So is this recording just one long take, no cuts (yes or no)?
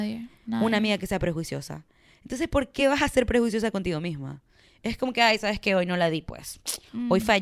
yes